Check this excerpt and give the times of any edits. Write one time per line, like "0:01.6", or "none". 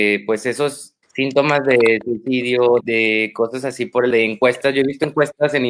0:01.0
0:02.8
0:04.1